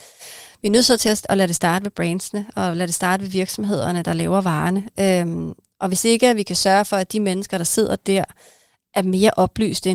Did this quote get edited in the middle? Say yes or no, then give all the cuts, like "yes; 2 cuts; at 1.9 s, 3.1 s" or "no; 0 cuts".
no; 0 cuts